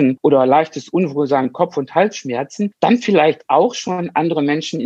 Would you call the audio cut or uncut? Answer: uncut